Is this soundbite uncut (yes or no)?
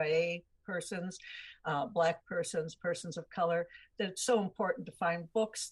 yes